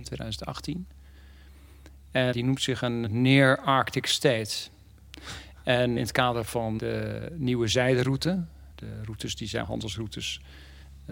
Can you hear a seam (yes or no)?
yes